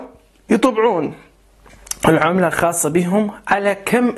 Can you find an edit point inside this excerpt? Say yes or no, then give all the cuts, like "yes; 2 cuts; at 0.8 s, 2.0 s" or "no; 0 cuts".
no; 0 cuts